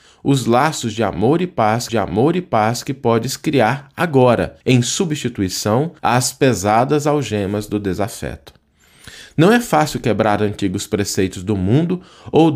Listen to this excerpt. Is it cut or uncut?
cut